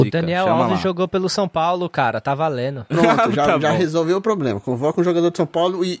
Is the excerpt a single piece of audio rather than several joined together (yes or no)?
yes